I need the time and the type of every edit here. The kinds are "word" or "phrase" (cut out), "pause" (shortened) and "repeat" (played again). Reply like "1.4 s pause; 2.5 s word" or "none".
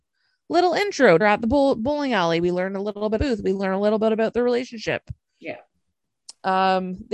1.2 s phrase; 3.2 s word